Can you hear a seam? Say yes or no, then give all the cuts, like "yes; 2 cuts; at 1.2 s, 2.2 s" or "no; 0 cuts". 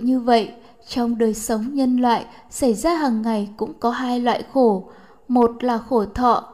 no; 0 cuts